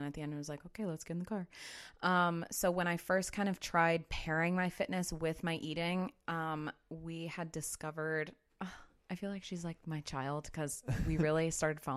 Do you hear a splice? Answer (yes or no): no